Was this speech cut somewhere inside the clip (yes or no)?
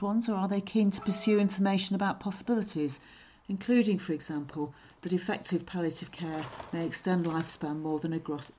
no